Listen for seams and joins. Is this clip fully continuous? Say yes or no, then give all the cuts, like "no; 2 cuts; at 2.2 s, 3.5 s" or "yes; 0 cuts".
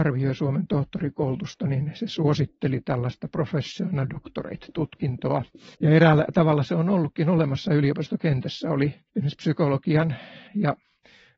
no; 3 cuts; at 5.7 s, 9.1 s, 10.5 s